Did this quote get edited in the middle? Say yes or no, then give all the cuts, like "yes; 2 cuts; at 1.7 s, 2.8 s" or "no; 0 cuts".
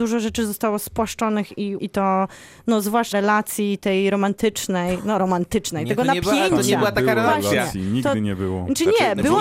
yes; 2 cuts; at 1.8 s, 3.1 s